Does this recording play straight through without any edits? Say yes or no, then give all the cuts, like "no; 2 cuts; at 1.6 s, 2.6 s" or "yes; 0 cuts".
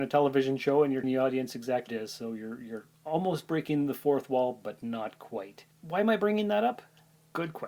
no; 3 cuts; at 1.0 s, 1.9 s, 5.7 s